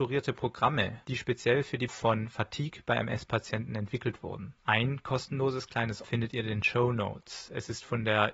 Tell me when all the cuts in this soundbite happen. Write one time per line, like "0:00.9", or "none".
0:01.9
0:04.6
0:06.0